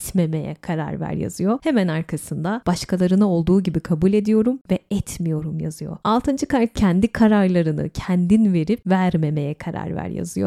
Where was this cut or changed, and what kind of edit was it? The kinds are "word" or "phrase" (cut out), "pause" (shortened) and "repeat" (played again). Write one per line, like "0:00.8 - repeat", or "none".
0:06.7 - word